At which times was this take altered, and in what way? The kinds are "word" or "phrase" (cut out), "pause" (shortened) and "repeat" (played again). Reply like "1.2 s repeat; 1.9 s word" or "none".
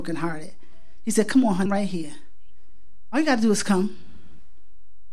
1.7 s word